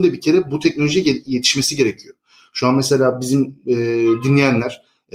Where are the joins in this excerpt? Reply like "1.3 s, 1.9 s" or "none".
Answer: none